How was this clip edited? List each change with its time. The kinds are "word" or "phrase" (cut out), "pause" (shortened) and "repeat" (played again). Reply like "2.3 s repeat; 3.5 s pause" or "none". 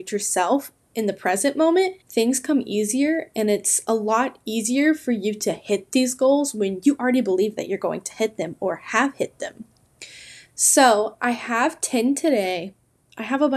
2.0 s pause